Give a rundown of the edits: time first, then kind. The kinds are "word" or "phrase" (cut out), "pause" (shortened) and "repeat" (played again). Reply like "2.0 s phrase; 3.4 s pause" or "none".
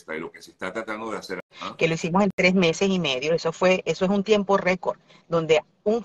1.5 s pause